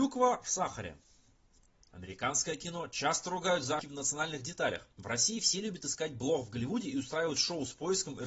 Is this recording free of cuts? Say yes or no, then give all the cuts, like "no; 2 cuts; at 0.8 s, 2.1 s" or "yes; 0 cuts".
no; 2 cuts; at 3.8 s, 4.9 s